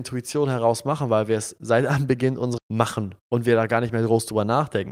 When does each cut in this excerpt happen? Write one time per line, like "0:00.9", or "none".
0:02.6
0:03.2